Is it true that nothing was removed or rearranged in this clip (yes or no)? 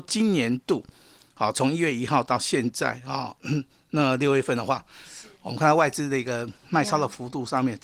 yes